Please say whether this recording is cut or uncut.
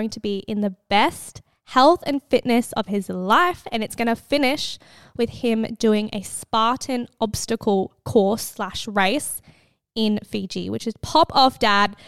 uncut